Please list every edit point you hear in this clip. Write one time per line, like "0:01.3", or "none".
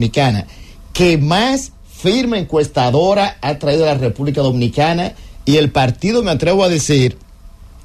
none

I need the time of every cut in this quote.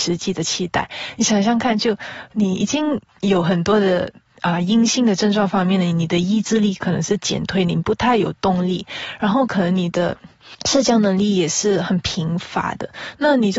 0:03.1

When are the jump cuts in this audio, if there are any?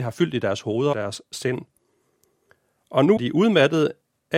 0:00.9
0:03.2

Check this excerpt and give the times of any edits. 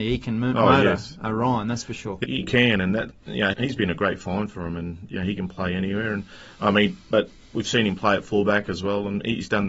0:02.2
0:03.1
0:03.5

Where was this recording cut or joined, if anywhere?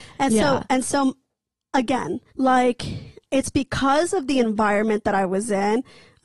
0:02.3

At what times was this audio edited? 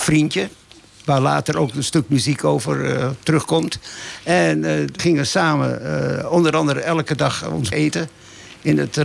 0:05.0
0:07.7

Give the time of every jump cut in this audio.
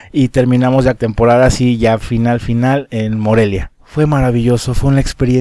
0:01.0
0:02.0
0:03.7

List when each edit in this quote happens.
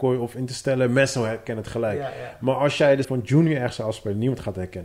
0:03.0

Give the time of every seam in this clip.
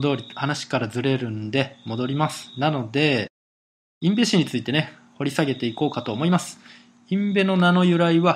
none

